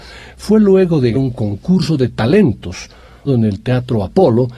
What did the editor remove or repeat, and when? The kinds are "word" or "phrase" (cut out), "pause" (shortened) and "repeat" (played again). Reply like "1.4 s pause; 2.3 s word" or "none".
1.1 s word; 3.3 s word